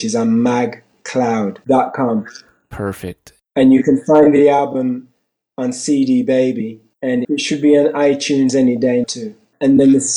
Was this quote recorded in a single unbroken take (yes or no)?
no